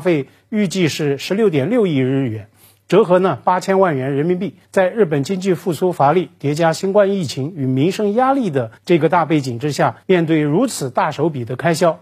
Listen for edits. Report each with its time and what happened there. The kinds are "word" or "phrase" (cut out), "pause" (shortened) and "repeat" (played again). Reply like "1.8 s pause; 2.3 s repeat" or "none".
4.6 s pause; 8.8 s pause; 10.0 s pause